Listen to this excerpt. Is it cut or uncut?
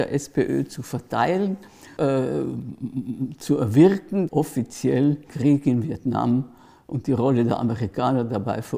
cut